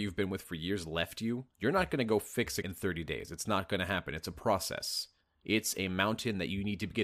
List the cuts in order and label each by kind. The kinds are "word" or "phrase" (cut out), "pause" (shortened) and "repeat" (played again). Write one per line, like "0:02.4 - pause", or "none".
0:01.5 - pause
0:02.6 - word